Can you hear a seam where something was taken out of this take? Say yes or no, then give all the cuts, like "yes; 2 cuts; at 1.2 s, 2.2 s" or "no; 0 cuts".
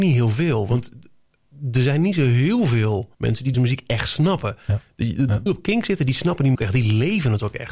yes; 4 cuts; at 3.1 s, 3.5 s, 5.5 s, 6.6 s